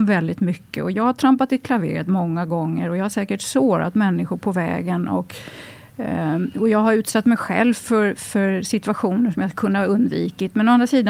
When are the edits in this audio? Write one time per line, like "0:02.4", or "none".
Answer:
none